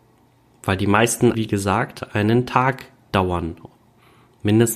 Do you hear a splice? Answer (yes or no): yes